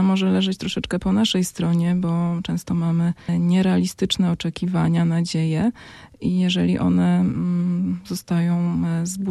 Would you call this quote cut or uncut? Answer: uncut